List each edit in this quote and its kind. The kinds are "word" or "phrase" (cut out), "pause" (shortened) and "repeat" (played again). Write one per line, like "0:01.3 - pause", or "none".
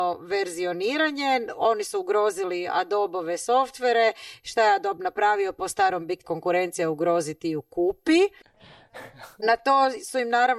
0:06.2 - phrase